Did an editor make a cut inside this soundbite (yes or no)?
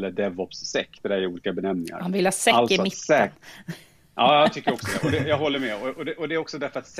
no